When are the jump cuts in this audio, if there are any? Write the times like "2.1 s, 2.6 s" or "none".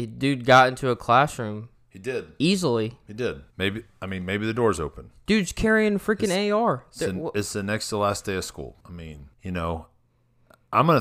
3.5 s, 8.8 s, 9.3 s